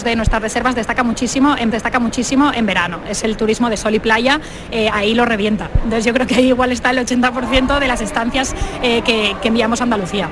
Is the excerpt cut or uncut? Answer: cut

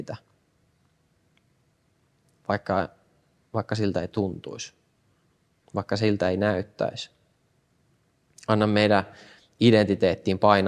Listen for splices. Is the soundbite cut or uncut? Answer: uncut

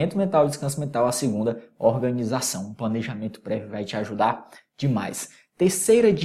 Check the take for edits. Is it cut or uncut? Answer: uncut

